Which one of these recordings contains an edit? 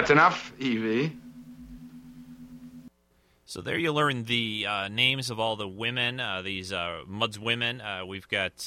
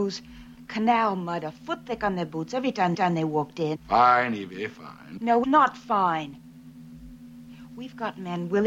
second; 2 cuts; at 2.9 s, 5.4 s

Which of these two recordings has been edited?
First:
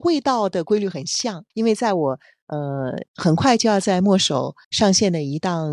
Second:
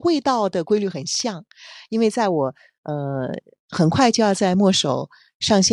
first; 3 cuts; at 1.5 s, 3.1 s, 4.6 s

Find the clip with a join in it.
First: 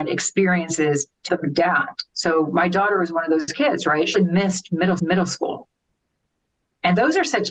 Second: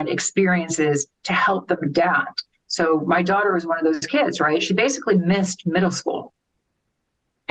first; 4 cuts; at 1.3 s, 2.1 s, 4.1 s, 5.0 s

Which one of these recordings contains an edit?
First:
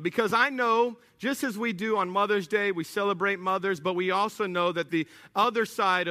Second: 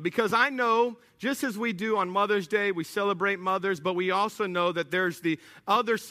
first; 1 cut; at 4.9 s

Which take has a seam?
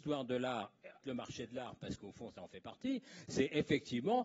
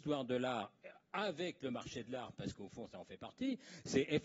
first; 1 cut; at 1.0 s

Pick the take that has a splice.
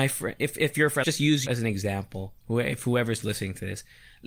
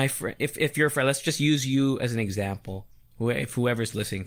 first; 3 cuts; at 1.0 s, 1.5 s, 2.4 s

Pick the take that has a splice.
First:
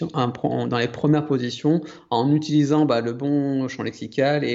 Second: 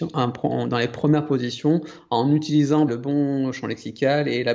second; 1 cut; at 2.9 s

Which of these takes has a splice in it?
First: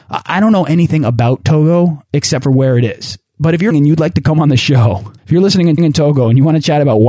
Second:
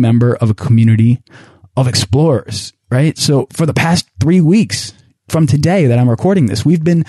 first; 3 cuts; at 3.7 s, 5.2 s, 5.8 s

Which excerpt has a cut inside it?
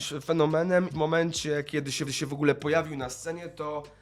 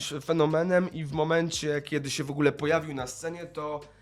first; 2 cuts; at 0.9 s, 2.1 s

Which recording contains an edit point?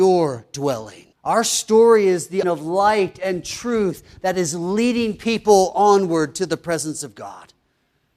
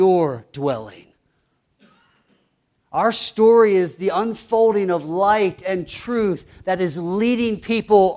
first; 2 cuts; at 1.1 s, 2.4 s

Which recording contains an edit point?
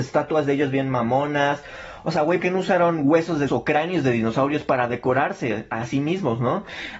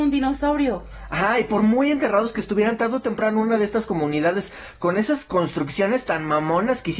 first; 2 cuts; at 2.4 s, 3.5 s

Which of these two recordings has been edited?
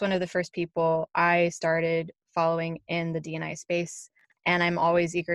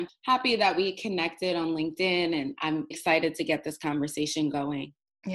second; 1 cut; at 2.9 s

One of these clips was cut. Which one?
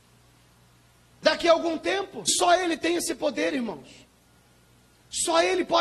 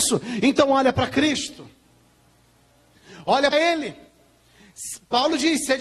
second; 1 cut; at 3.5 s

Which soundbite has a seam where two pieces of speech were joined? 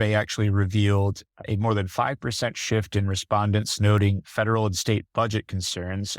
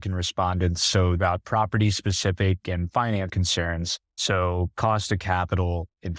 second; 2 cuts; at 1.2 s, 3.3 s

